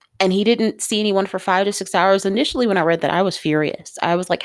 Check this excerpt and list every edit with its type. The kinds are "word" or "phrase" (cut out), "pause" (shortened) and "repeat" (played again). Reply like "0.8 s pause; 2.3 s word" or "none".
none